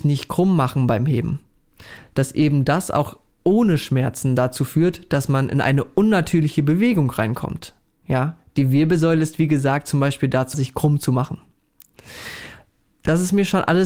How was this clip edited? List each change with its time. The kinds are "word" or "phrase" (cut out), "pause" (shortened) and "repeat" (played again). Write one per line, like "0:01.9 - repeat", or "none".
0:10.5 - word